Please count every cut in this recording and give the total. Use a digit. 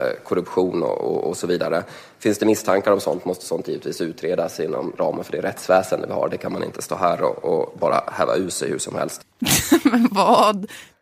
0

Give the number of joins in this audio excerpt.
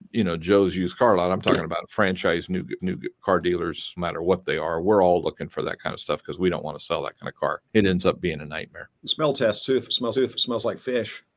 5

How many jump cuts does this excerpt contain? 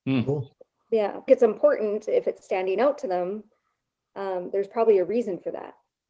1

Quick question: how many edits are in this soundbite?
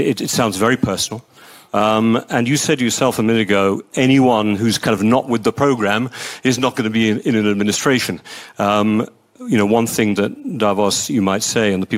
0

